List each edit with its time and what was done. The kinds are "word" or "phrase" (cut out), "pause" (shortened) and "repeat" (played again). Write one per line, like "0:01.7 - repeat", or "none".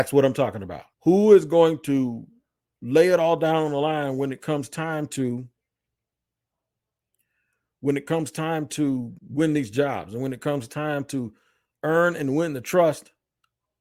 0:00.9 - pause
0:09.2 - pause